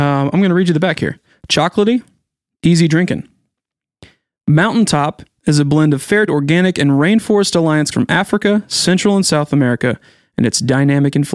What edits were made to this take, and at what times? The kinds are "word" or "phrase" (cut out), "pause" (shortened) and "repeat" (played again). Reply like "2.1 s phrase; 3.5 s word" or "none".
6.3 s word; 7.9 s word